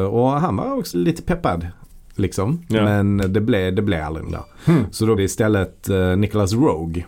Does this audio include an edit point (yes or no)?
yes